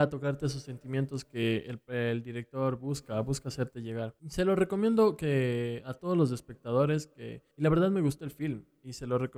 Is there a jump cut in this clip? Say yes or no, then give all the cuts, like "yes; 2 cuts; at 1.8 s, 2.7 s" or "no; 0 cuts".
yes; 2 cuts; at 4.2 s, 7.5 s